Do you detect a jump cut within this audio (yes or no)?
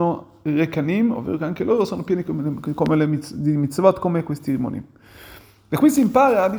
no